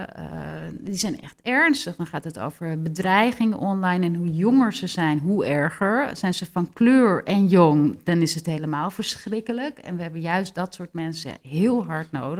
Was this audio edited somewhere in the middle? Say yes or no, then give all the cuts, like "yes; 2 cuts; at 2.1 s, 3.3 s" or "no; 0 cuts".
no; 0 cuts